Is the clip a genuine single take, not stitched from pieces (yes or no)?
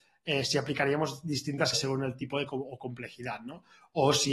no